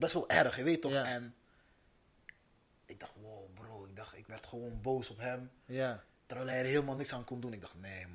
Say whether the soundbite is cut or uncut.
uncut